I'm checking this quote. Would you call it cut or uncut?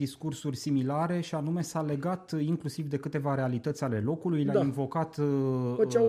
uncut